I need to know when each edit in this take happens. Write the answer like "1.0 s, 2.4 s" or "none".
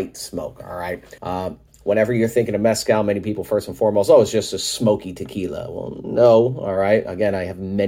1.2 s